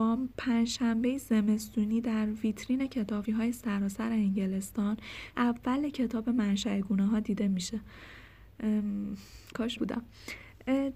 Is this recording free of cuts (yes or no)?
no